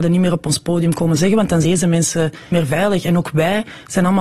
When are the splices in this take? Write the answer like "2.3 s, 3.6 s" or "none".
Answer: 1.6 s, 2.5 s